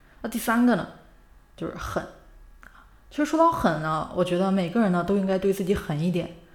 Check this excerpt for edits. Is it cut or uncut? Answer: uncut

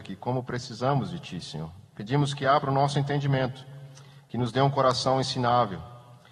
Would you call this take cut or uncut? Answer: uncut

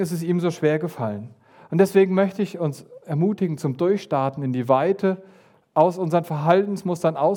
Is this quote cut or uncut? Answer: uncut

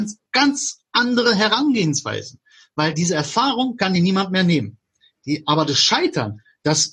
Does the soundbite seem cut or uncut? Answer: uncut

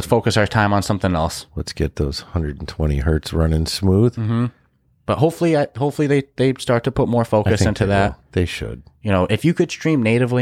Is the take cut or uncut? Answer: uncut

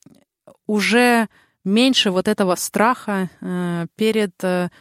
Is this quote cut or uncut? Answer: uncut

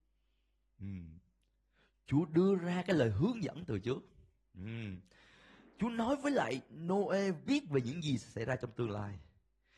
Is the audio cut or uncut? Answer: uncut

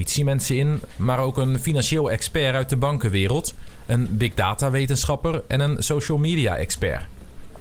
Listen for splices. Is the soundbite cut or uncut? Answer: uncut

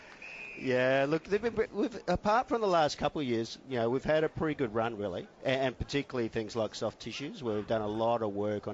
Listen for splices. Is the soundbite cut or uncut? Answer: cut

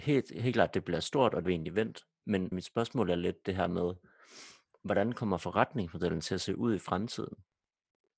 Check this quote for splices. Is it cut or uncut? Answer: cut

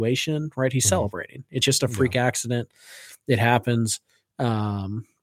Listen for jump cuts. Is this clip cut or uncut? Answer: uncut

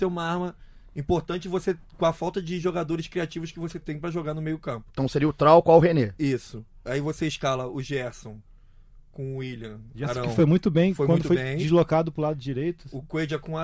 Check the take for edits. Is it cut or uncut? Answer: uncut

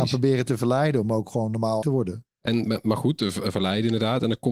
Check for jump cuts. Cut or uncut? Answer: cut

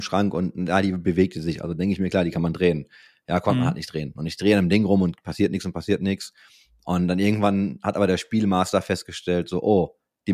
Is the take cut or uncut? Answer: uncut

